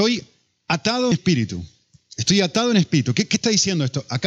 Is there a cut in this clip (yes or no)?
yes